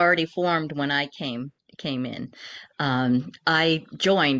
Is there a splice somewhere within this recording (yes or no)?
yes